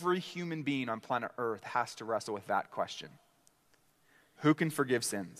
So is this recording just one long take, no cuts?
yes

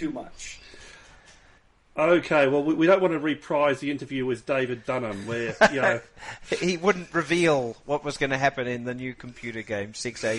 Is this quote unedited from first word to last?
yes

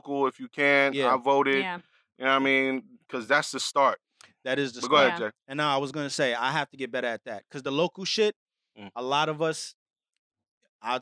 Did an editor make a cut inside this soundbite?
no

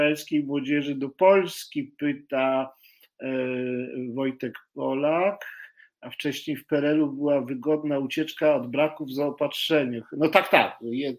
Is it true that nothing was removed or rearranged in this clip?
yes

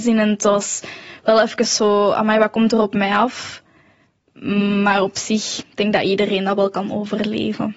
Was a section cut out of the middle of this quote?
no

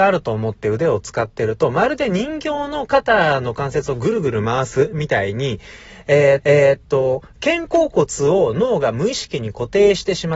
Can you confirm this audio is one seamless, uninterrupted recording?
no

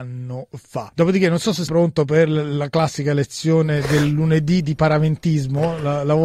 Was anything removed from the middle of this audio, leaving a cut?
yes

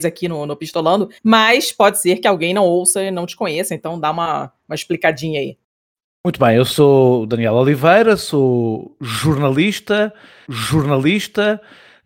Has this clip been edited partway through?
yes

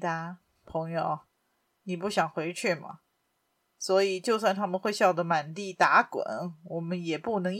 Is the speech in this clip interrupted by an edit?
no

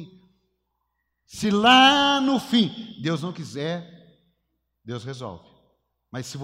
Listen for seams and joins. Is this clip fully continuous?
yes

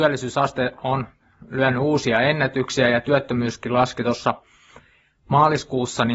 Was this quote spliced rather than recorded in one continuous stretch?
no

